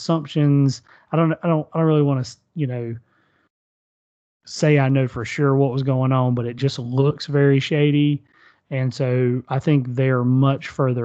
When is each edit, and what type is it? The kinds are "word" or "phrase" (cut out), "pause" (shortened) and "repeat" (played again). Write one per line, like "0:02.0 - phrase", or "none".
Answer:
none